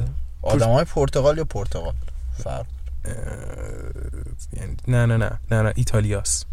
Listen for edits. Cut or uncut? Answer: uncut